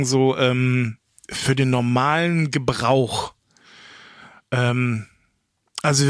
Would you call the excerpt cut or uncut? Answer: uncut